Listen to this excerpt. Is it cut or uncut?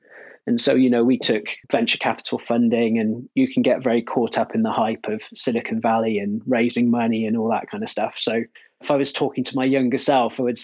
cut